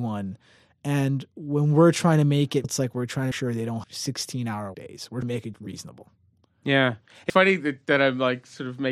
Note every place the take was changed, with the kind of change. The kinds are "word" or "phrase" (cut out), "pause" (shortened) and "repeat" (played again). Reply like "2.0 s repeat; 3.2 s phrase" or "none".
2.6 s word; 3.3 s word; 3.8 s word; 4.7 s word; 5.2 s word; 5.5 s word; 7.3 s word